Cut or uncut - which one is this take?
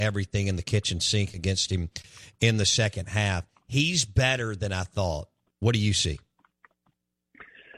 uncut